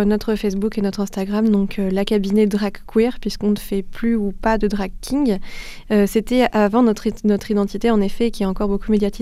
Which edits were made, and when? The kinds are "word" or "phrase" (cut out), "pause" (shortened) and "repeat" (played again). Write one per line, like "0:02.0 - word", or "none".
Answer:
none